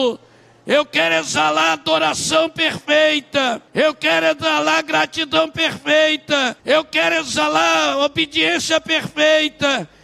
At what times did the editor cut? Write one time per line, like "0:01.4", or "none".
0:03.7
0:06.6